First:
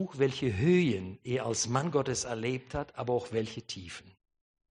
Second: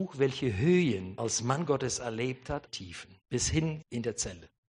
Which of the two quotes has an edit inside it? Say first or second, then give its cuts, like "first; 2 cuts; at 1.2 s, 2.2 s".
second; 4 cuts; at 1.2 s, 2.7 s, 3.2 s, 3.8 s